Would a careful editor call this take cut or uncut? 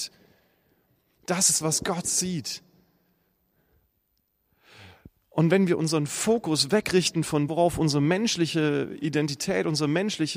cut